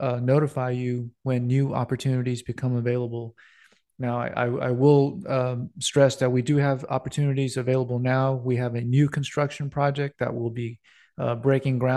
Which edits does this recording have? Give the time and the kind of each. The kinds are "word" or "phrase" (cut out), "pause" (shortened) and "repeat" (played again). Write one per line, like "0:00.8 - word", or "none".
none